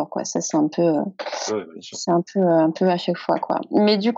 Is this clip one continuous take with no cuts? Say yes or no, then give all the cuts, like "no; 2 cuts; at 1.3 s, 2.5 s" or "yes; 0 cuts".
no; 1 cut; at 1.5 s